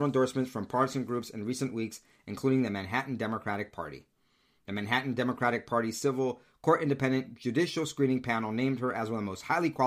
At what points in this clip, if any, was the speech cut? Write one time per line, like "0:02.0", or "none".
none